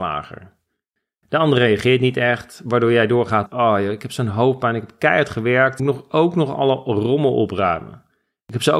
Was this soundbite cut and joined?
yes; 2 cuts; at 3.5 s, 5.8 s

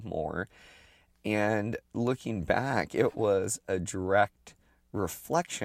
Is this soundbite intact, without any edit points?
yes; 0 cuts

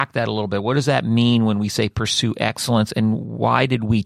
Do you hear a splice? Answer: no; 0 cuts

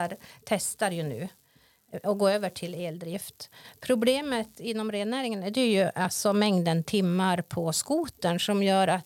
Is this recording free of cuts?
yes; 0 cuts

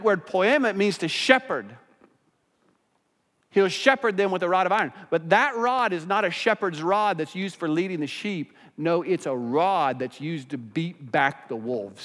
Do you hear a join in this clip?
no; 0 cuts

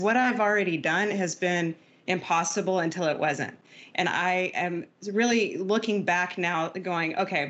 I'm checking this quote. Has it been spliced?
no; 0 cuts

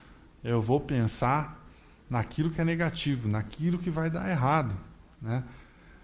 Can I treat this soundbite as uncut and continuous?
yes; 0 cuts

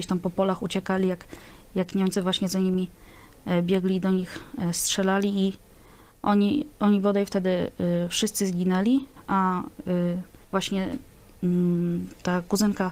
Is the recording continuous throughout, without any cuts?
no; 1 cut; at 10.4 s

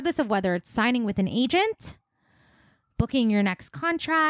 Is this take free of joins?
yes; 0 cuts

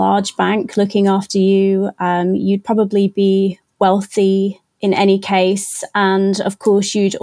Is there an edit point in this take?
no; 0 cuts

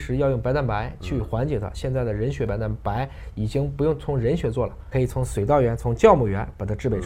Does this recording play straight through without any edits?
no; 1 cut; at 4.9 s

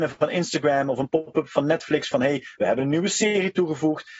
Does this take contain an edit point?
no; 0 cuts

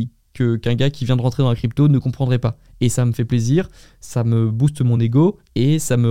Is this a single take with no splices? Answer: yes; 0 cuts

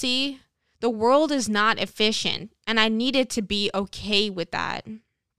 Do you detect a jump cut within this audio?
no; 0 cuts

